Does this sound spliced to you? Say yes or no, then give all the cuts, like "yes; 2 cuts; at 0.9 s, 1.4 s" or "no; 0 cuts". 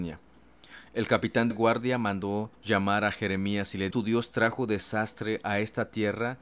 yes; 3 cuts; at 1.5 s, 2.5 s, 3.9 s